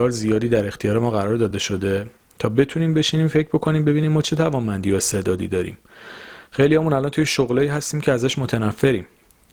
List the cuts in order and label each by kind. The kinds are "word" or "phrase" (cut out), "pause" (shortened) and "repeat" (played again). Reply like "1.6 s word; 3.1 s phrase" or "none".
none